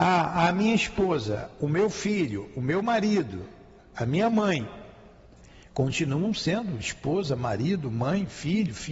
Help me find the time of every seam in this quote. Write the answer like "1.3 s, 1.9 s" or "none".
none